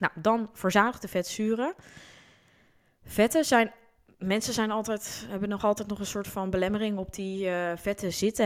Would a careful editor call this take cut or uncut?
uncut